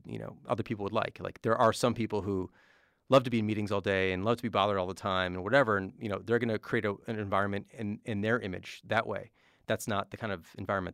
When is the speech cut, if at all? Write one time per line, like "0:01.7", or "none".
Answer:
none